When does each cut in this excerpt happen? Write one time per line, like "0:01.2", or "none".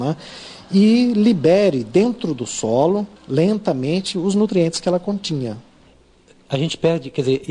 0:03.2